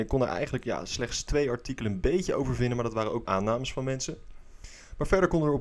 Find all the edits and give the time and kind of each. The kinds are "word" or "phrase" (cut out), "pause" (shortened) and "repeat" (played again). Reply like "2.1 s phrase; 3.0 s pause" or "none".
3.3 s word